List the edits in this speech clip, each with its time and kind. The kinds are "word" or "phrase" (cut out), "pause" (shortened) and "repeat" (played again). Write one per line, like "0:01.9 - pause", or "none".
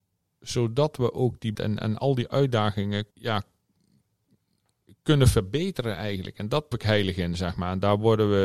0:01.5 - word
0:03.1 - pause
0:06.7 - phrase